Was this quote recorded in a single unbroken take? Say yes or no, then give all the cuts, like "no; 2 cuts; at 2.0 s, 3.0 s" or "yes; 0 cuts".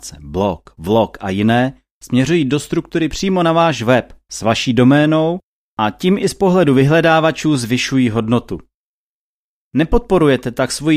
yes; 0 cuts